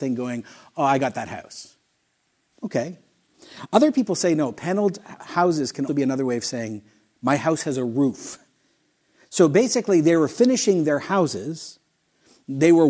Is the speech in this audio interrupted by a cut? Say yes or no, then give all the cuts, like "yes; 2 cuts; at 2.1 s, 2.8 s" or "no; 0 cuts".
yes; 2 cuts; at 5.2 s, 5.9 s